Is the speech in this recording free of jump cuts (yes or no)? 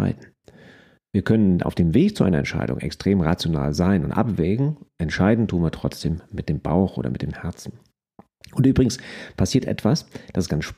yes